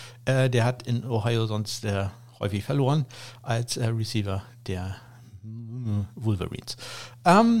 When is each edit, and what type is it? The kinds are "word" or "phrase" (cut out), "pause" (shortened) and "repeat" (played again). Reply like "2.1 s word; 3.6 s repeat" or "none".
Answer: none